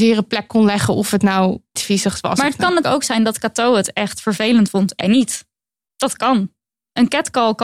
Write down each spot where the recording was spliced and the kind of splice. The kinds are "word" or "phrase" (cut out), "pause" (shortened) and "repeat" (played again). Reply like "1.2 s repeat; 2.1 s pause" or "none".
1.8 s word; 2.8 s word; 5.0 s word